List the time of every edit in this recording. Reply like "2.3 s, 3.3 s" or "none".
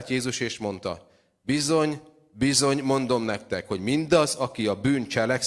none